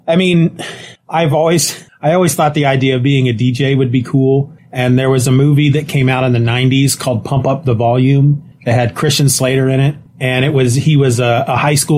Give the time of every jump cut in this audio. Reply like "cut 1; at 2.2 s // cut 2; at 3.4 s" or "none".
none